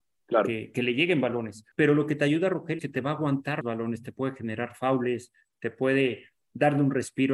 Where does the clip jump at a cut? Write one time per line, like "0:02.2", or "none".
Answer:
0:01.7
0:02.8
0:03.6